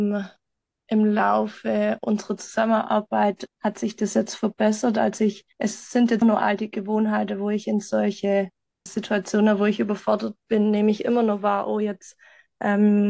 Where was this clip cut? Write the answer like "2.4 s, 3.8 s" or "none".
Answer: 3.5 s, 5.5 s, 6.2 s, 8.9 s